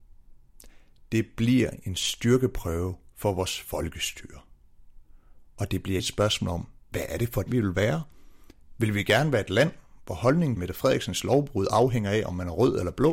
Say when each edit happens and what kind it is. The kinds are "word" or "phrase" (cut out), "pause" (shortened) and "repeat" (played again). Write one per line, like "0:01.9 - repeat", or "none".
0:06.0 - word
0:07.5 - word
0:10.6 - word